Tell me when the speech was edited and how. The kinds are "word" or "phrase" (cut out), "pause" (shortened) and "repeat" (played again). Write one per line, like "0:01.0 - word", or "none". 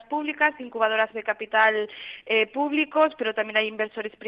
0:01.1 - phrase